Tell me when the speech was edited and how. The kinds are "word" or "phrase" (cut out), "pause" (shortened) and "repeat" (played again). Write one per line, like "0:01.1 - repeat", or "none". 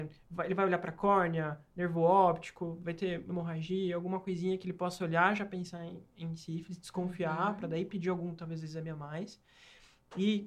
none